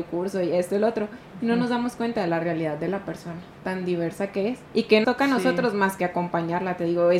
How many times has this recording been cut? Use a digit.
2